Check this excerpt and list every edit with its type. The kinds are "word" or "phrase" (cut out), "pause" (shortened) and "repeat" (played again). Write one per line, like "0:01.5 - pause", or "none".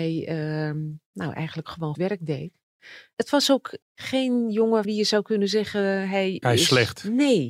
0:01.9 - word
0:04.8 - word
0:06.4 - word